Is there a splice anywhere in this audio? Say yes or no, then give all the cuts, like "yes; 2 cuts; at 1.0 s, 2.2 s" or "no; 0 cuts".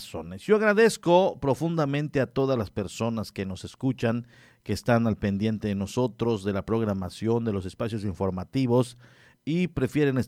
no; 0 cuts